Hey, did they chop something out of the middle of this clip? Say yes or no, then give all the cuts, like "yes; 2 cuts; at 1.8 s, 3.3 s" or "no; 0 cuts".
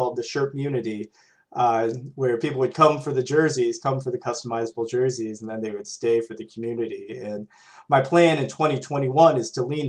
no; 0 cuts